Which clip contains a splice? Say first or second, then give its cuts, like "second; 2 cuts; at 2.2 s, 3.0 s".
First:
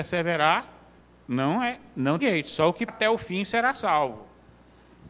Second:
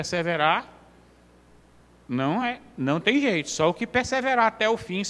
first; 3 cuts; at 1.0 s, 2.2 s, 2.9 s